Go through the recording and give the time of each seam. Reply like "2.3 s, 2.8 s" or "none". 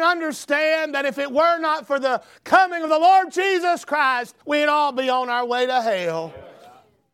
4.4 s